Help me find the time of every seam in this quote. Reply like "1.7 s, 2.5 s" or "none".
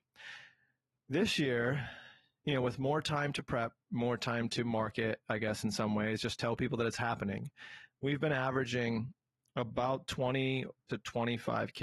none